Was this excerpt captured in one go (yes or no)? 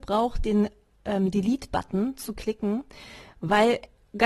yes